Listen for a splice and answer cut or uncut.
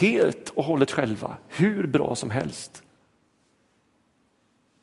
uncut